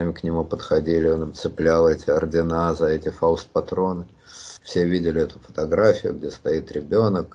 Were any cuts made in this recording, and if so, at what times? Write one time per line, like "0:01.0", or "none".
0:04.6